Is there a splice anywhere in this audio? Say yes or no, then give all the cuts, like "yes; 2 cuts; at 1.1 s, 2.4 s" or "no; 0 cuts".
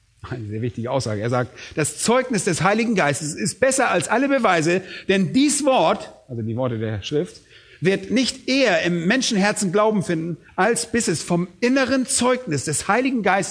no; 0 cuts